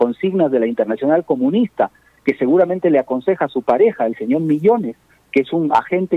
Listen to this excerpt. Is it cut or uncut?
uncut